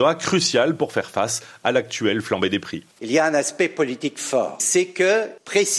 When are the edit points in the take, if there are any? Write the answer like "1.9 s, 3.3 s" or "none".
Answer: 2.9 s